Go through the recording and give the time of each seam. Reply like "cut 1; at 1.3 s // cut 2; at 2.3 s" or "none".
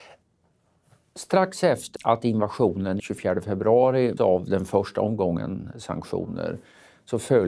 cut 1; at 2.0 s // cut 2; at 3.0 s // cut 3; at 4.2 s